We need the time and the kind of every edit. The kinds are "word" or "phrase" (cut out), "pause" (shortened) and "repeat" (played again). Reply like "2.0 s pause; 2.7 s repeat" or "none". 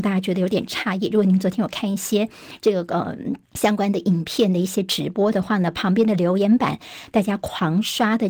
3.5 s pause